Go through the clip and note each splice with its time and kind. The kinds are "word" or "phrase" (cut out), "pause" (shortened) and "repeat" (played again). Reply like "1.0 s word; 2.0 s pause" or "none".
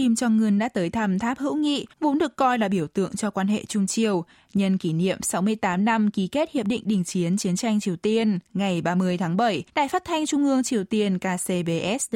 1.9 s pause; 8.5 s pause; 9.7 s pause